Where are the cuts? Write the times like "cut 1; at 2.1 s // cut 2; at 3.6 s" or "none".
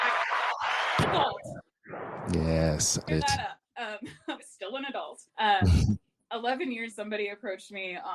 cut 1; at 1.0 s // cut 2; at 3.1 s // cut 3; at 5.3 s // cut 4; at 6.9 s